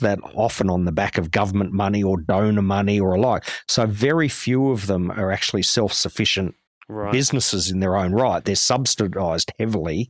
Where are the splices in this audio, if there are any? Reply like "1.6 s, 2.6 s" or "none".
6.7 s